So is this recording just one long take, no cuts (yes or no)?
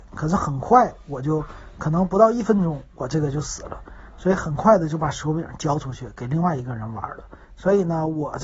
no